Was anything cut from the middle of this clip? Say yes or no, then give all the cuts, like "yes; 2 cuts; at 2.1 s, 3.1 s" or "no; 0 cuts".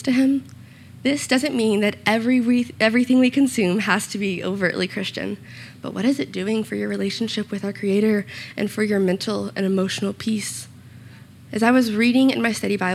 no; 0 cuts